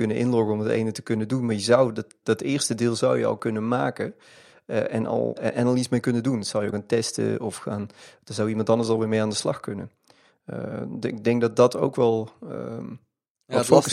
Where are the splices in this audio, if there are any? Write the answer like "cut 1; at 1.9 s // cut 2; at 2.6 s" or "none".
cut 1; at 2.2 s // cut 2; at 5.4 s // cut 3; at 6.7 s